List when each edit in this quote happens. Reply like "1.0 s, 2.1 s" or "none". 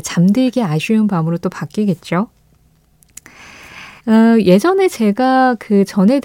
4.0 s